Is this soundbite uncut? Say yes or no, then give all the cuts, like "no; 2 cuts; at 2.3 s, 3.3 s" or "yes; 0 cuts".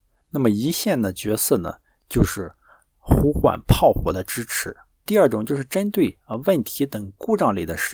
yes; 0 cuts